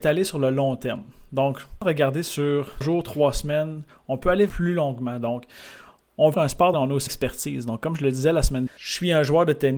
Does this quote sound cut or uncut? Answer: cut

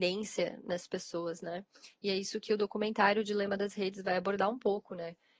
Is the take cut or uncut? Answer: uncut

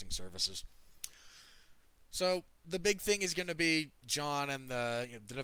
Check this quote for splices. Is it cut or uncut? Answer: uncut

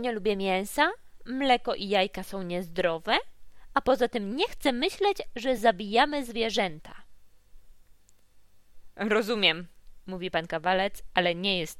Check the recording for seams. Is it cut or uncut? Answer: uncut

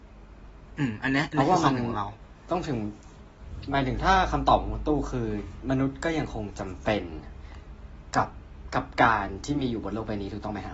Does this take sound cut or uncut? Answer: uncut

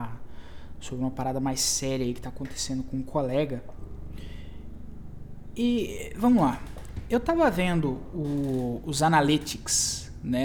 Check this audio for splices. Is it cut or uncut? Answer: uncut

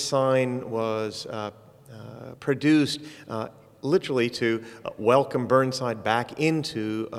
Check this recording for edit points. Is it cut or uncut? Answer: uncut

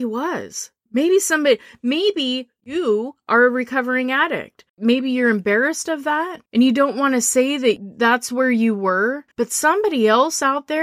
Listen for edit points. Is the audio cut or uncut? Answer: cut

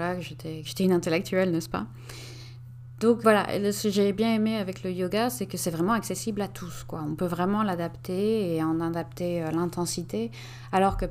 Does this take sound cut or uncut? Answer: cut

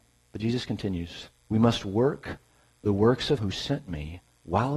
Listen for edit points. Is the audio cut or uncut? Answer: cut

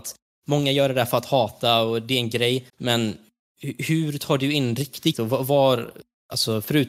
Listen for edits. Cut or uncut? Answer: cut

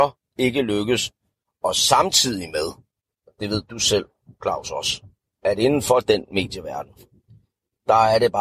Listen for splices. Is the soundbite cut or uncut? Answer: uncut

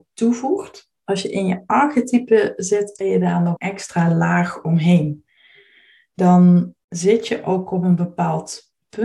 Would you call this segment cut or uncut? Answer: cut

